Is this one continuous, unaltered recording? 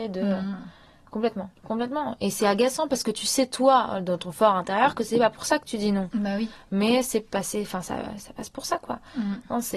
no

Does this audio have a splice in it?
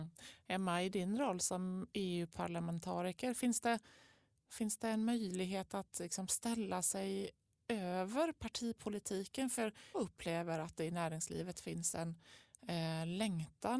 yes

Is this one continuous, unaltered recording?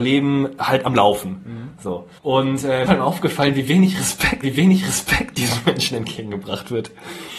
no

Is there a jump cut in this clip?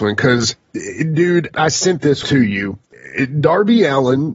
yes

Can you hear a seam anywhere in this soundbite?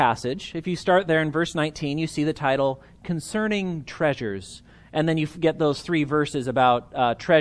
no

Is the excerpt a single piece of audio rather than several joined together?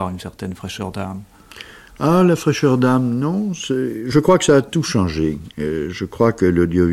yes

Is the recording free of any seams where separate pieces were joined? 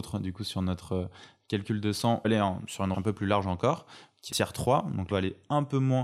no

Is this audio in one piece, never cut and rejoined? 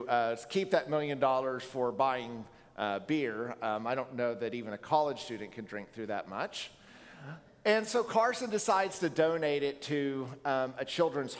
yes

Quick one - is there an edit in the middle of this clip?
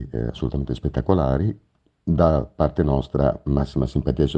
no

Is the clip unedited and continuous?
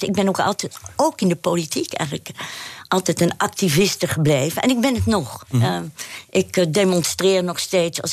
yes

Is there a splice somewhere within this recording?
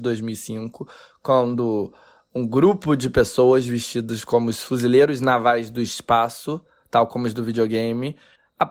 no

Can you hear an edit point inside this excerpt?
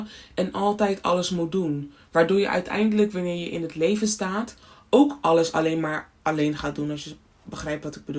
no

